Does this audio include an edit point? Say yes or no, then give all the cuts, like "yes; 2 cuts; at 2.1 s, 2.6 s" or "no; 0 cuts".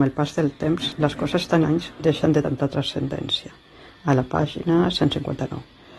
yes; 2 cuts; at 1.6 s, 2.4 s